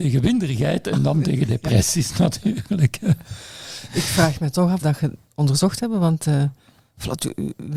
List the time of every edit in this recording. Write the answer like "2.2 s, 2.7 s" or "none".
4.8 s